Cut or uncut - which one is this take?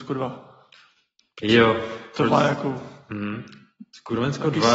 uncut